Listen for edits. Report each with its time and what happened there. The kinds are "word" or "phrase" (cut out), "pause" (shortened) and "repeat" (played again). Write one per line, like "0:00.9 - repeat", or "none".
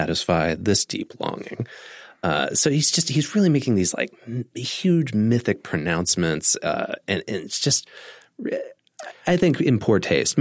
none